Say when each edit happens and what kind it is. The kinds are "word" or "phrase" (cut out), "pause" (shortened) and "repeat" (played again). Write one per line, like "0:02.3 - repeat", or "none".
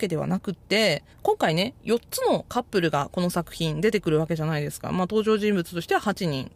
0:01.1 - pause